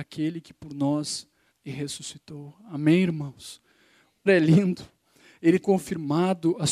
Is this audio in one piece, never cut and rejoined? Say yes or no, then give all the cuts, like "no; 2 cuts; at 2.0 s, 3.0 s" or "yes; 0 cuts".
no; 3 cuts; at 1.5 s, 4.3 s, 5.6 s